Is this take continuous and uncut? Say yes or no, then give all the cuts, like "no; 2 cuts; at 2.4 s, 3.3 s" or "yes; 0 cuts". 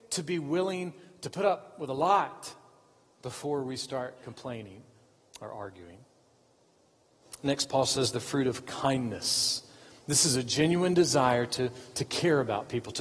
yes; 0 cuts